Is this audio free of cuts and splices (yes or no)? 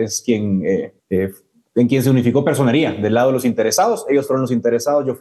no